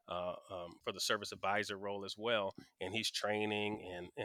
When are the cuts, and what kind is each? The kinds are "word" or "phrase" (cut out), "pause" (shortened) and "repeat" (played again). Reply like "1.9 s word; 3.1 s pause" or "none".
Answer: none